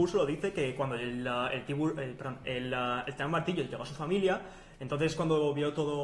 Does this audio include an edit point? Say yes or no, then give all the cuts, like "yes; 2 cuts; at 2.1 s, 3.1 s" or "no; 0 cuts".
no; 0 cuts